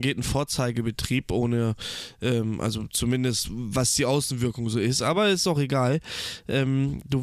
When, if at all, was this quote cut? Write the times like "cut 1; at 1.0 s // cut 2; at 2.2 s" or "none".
none